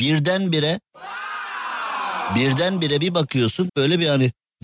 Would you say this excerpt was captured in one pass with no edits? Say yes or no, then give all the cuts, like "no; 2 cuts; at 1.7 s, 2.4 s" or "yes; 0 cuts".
no; 1 cut; at 3.7 s